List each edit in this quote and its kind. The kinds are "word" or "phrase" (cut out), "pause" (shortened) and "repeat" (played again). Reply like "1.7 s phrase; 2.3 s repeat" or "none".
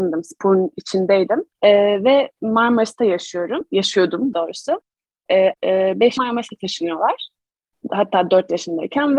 1.5 s pause; 4.3 s word; 5.5 s word; 6.2 s word